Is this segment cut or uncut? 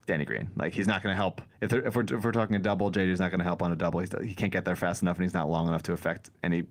cut